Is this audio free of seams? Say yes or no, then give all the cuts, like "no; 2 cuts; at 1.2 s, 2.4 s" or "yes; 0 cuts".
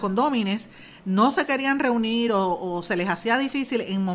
yes; 0 cuts